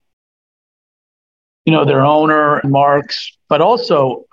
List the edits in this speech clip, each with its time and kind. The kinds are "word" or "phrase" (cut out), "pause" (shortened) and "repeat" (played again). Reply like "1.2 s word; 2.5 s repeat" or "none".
2.6 s phrase